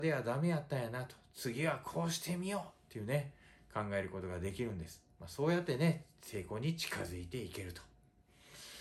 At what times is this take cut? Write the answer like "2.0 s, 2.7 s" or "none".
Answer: none